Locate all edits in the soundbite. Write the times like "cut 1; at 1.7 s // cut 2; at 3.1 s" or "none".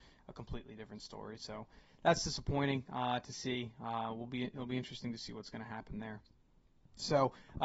none